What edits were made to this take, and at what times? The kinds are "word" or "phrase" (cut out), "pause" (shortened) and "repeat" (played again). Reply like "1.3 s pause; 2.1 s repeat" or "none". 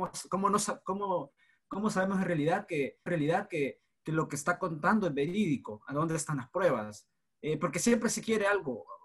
3.1 s repeat